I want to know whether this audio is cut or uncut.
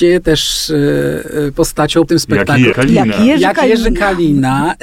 cut